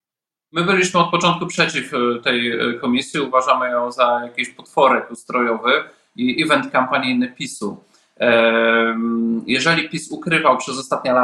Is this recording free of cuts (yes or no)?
yes